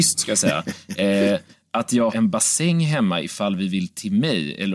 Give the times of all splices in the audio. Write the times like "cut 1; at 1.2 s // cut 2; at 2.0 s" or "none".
cut 1; at 2.1 s